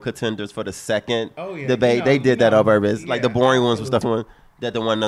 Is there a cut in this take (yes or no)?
yes